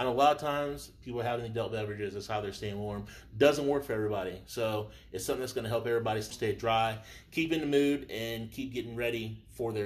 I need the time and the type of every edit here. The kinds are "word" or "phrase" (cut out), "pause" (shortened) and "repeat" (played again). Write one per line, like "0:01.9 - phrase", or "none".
0:06.3 - word